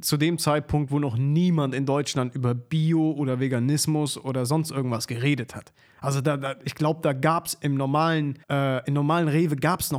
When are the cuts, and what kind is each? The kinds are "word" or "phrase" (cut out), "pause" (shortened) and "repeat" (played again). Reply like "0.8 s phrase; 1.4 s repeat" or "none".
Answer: 8.4 s pause